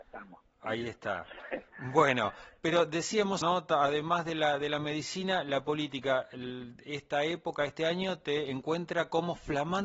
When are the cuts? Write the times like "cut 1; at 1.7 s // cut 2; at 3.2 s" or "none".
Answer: cut 1; at 3.4 s